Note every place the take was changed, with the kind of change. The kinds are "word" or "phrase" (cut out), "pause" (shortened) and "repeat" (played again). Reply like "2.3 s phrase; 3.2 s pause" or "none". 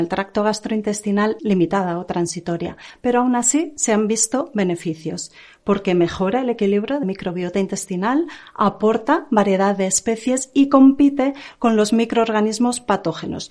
1.4 s word; 7.0 s word

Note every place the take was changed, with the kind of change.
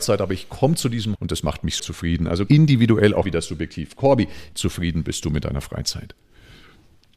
1.2 s word; 1.8 s word; 2.5 s word; 3.2 s word; 4.5 s word

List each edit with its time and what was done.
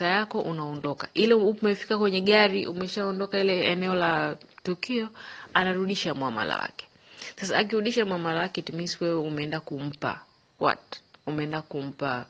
none

